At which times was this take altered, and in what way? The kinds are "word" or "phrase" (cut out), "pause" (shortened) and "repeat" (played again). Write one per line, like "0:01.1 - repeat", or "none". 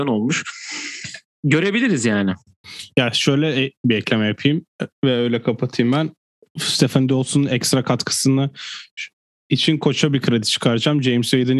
none